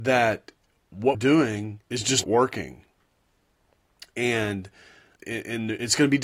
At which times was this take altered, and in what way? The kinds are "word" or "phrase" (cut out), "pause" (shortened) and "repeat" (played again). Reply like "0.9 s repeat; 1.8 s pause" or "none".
1.1 s word; 1.8 s pause; 2.2 s word; 5.2 s word